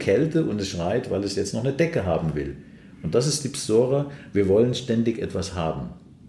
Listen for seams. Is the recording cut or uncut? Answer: uncut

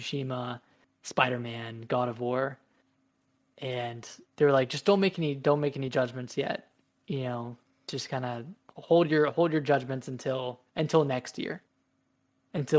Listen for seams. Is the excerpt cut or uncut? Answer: cut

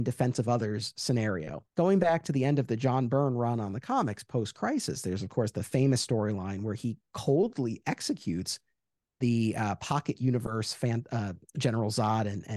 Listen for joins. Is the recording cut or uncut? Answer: cut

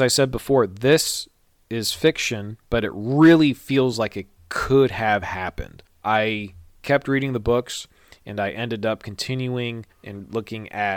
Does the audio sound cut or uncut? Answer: uncut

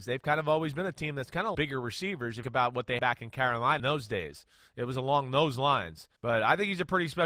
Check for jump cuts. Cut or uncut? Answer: cut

